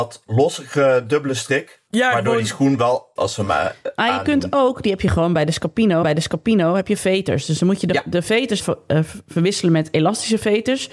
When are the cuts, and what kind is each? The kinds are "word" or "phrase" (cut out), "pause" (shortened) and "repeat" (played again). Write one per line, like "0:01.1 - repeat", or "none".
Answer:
0:01.9 - pause
0:03.2 - phrase
0:06.0 - repeat
0:07.0 - phrase
0:08.6 - word